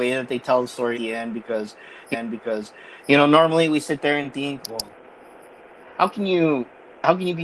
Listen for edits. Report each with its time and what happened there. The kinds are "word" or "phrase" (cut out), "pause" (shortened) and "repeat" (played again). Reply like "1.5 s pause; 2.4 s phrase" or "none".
0.9 s word; 2.1 s repeat; 4.6 s word